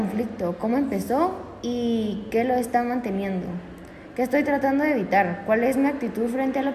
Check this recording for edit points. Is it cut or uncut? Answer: uncut